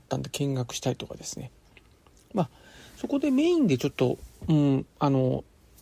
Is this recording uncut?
no; 1 cut; at 4.9 s

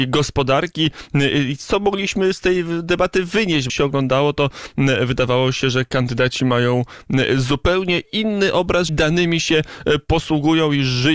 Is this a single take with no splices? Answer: no; 2 cuts; at 3.7 s, 8.9 s

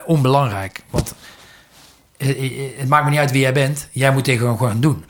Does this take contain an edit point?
no; 0 cuts

